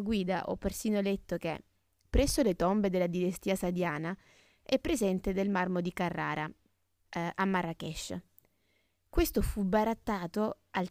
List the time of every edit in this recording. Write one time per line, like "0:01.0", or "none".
none